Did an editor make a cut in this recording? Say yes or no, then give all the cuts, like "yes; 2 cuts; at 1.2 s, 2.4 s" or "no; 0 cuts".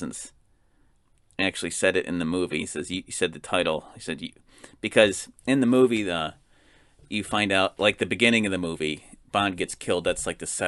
no; 0 cuts